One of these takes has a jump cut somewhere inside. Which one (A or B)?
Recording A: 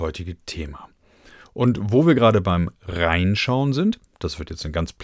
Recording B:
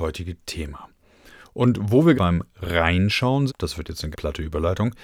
B